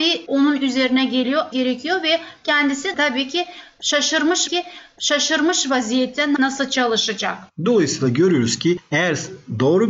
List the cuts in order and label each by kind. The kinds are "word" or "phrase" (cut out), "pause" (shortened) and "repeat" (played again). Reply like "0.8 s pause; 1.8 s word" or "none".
1.5 s word; 4.5 s repeat; 6.4 s word